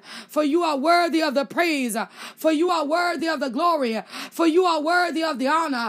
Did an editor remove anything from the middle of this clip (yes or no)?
no